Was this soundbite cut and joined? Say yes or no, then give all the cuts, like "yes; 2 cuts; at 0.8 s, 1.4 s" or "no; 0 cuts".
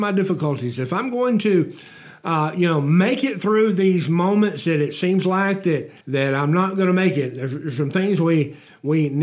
yes; 1 cut; at 6.0 s